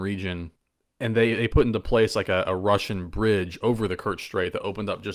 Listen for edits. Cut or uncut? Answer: uncut